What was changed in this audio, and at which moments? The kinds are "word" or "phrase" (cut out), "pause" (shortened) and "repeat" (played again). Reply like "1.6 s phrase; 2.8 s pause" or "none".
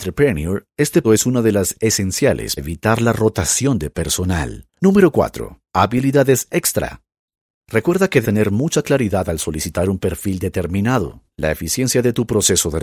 1.0 s word; 2.6 s word; 4.7 s pause; 5.7 s pause; 8.2 s word; 11.3 s pause